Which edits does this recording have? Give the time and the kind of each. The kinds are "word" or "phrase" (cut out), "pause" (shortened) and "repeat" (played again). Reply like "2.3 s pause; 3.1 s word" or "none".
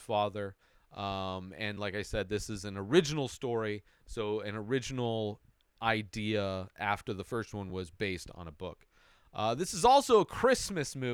none